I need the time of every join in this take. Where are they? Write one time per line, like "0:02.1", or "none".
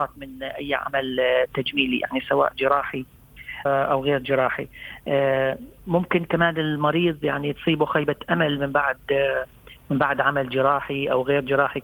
0:03.7